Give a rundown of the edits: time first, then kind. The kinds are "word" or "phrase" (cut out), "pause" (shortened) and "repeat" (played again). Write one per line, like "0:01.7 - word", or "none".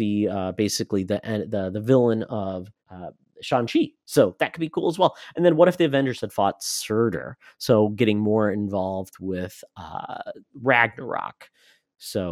0:02.8 - pause